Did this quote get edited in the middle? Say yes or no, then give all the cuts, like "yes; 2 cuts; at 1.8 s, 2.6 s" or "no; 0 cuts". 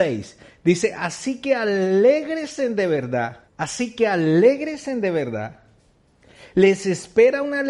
yes; 1 cut; at 3.5 s